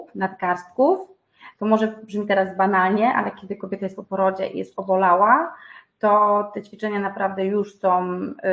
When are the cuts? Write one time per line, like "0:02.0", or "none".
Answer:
none